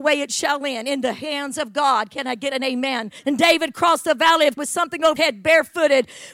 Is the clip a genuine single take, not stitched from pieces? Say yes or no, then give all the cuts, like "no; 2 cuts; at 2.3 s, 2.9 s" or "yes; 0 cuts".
no; 3 cuts; at 3.2 s, 4.6 s, 5.2 s